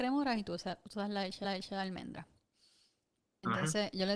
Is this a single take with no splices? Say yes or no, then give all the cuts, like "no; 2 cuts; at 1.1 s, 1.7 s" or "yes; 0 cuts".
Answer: no; 1 cut; at 1.4 s